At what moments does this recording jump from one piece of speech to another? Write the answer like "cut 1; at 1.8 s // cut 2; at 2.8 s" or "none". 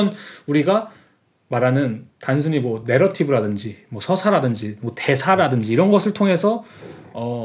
none